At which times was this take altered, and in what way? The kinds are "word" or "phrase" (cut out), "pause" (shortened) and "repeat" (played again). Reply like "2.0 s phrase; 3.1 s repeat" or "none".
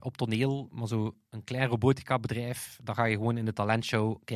none